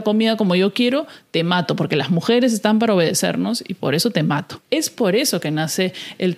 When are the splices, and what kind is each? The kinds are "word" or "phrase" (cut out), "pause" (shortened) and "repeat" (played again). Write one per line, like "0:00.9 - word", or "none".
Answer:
0:04.6 - pause